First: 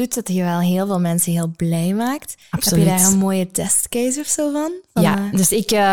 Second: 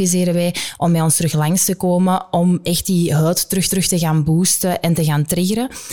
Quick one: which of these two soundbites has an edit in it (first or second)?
second